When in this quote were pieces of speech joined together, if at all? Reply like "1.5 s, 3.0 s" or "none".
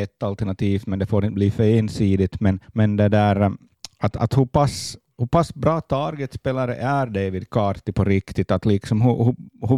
2.6 s